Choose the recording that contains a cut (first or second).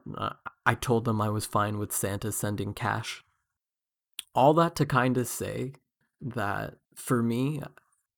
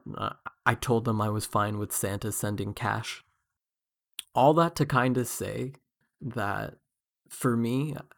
first